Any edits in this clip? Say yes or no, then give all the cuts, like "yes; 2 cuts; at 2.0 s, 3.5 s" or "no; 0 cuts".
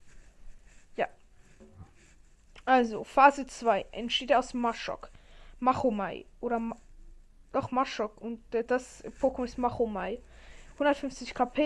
no; 0 cuts